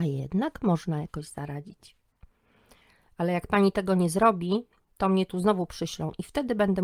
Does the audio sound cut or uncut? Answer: uncut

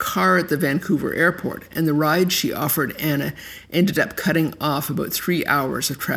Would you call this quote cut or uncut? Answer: uncut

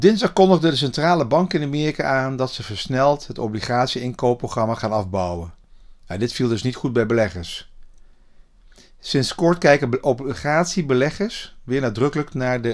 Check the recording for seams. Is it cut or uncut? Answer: uncut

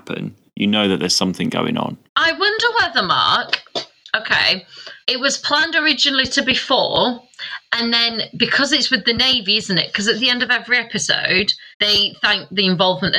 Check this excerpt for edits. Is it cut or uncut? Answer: cut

